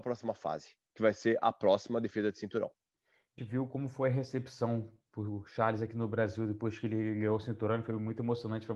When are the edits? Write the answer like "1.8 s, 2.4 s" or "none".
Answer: 3.4 s